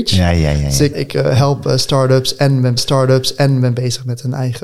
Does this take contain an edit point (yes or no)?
yes